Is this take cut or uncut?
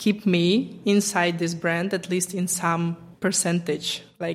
uncut